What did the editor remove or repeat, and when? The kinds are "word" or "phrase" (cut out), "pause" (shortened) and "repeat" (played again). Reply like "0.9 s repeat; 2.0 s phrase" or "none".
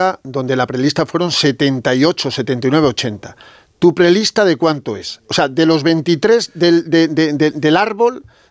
none

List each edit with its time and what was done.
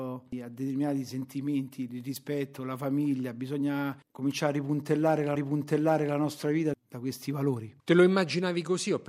5.4 s repeat; 7.8 s pause

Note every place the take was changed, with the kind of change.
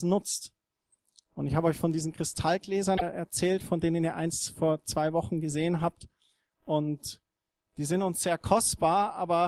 none

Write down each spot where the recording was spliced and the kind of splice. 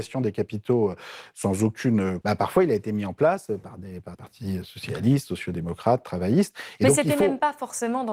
2.2 s word; 4.1 s word

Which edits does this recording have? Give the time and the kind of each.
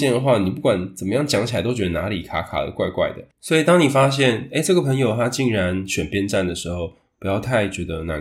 3.3 s pause

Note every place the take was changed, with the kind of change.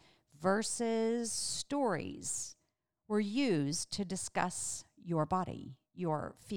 none

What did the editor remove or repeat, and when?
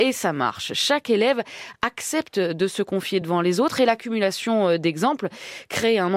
none

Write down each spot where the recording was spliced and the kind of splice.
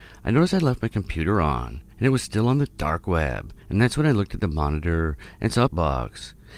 1.9 s pause; 3.6 s pause; 5.7 s phrase

